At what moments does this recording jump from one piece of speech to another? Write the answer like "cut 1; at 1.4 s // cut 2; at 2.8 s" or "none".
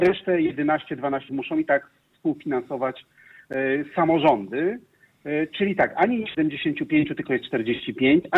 cut 1; at 1.3 s // cut 2; at 6.3 s